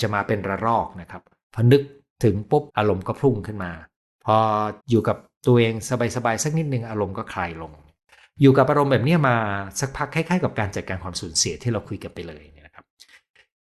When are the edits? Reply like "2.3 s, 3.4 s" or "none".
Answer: 2.7 s, 4.8 s